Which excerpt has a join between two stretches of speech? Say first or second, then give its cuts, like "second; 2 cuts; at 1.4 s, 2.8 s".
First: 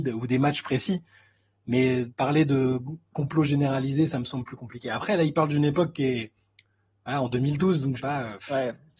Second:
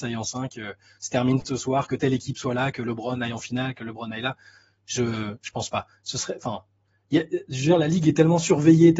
first; 1 cut; at 8.0 s